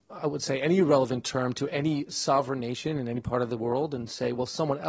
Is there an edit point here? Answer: no; 0 cuts

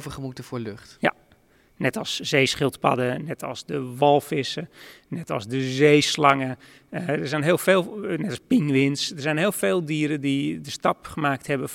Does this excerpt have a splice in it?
no; 0 cuts

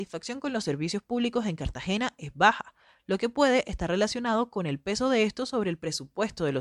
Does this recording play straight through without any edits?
yes; 0 cuts

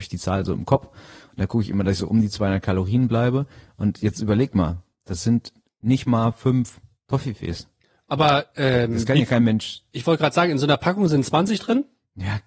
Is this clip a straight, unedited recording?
yes; 0 cuts

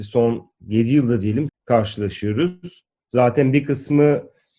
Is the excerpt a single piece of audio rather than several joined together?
no; 1 cut; at 1.5 s

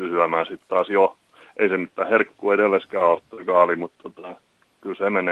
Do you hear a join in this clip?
no; 0 cuts

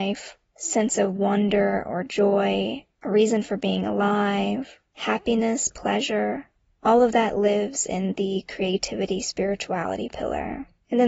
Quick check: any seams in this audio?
no; 0 cuts

